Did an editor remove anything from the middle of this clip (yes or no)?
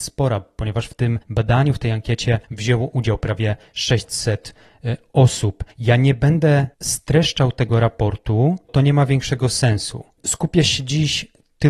yes